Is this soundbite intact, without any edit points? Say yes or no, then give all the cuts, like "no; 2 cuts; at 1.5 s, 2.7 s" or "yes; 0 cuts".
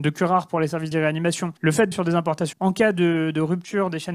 no; 4 cuts; at 0.9 s, 1.6 s, 1.9 s, 2.5 s